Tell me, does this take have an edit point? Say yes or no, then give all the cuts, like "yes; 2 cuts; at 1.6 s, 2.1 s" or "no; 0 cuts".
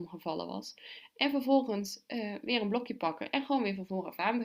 no; 0 cuts